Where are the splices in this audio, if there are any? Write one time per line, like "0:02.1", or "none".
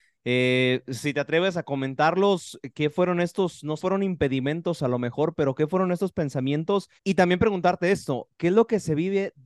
0:03.8
0:07.0